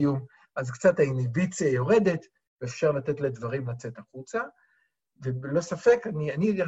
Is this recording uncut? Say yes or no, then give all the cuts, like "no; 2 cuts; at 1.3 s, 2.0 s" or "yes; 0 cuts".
yes; 0 cuts